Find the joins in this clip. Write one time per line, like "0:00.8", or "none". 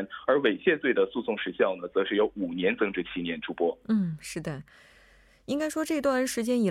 none